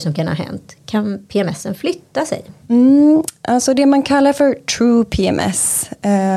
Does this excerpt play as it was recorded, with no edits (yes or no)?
no